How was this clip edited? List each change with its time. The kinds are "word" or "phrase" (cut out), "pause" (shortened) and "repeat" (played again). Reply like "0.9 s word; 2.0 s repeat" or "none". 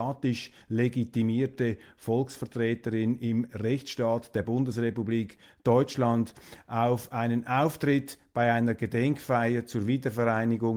none